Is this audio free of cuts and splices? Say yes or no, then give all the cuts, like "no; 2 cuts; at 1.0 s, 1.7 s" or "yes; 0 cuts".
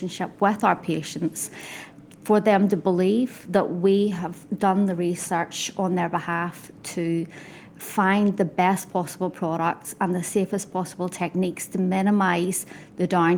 yes; 0 cuts